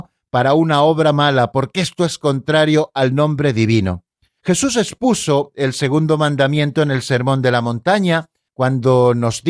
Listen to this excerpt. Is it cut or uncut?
uncut